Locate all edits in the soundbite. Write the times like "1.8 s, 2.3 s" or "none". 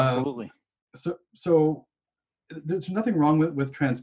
none